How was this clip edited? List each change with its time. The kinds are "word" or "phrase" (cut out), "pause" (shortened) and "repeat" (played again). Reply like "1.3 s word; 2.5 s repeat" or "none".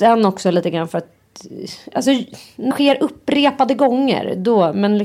2.7 s word

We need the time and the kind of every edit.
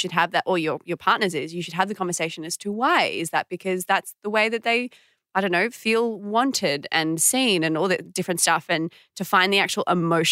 none

